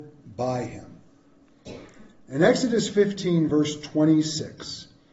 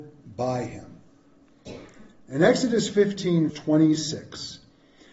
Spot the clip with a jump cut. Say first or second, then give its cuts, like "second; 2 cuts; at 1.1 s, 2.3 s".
second; 1 cut; at 3.5 s